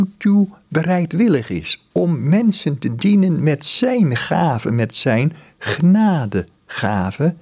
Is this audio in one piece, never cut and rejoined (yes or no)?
yes